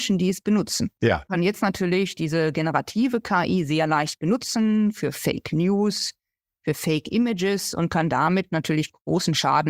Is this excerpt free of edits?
yes; 0 cuts

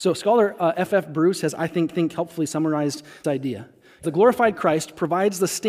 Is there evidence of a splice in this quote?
yes; 3 cuts; at 1.9 s, 3.2 s, 4.0 s

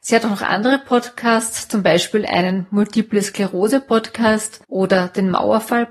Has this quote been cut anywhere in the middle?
yes; 1 cut; at 4.6 s

